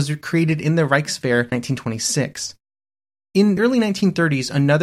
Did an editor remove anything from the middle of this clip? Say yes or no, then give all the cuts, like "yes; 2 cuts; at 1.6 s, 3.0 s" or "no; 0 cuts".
yes; 2 cuts; at 1.5 s, 3.6 s